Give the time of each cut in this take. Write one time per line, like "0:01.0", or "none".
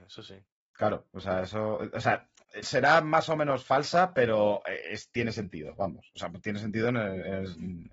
0:02.6